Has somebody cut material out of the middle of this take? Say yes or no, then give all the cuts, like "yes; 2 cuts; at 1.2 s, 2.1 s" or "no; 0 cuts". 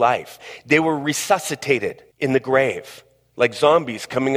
yes; 1 cut; at 2.1 s